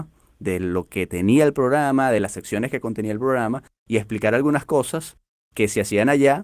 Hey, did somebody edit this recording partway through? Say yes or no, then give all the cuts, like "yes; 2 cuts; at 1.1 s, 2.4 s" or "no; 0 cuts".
no; 0 cuts